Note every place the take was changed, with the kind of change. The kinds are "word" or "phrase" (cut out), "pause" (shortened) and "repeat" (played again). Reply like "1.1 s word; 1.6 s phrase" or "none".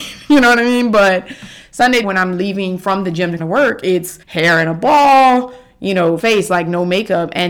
2.0 s phrase; 3.4 s word; 4.2 s pause; 6.2 s word